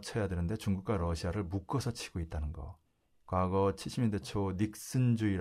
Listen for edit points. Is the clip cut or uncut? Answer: uncut